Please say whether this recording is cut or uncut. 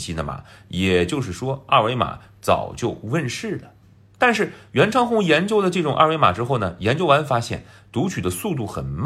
uncut